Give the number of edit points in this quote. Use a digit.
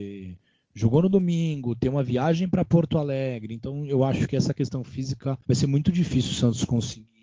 1